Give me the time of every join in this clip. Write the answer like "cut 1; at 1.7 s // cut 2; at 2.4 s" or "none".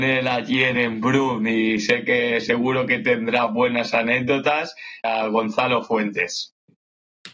cut 1; at 5.0 s